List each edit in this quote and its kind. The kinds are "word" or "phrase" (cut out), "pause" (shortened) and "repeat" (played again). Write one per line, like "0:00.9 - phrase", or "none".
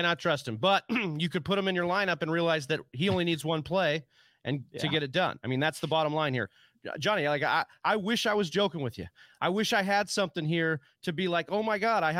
none